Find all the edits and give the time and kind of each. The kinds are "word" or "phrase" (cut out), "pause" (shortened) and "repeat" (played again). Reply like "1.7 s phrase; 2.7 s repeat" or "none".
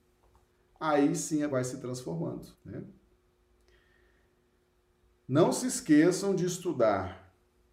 1.5 s word; 2.5 s pause